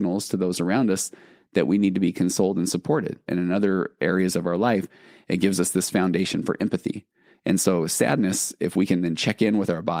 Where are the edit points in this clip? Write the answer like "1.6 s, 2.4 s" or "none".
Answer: none